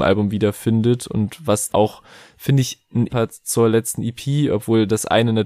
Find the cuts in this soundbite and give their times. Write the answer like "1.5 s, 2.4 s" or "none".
1.7 s, 3.1 s